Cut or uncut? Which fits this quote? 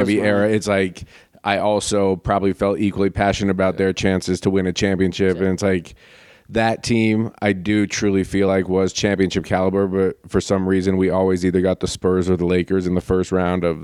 uncut